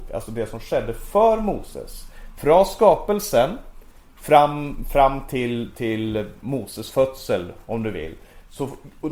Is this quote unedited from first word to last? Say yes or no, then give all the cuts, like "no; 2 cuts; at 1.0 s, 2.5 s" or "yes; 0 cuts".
yes; 0 cuts